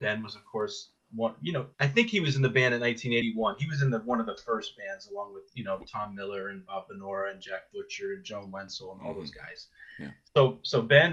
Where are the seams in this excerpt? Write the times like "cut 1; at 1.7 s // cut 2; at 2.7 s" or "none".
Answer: cut 1; at 1.7 s // cut 2; at 3.2 s